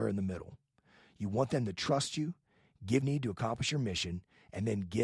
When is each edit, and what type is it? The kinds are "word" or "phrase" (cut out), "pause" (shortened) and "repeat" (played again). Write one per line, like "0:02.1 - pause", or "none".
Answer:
0:03.0 - phrase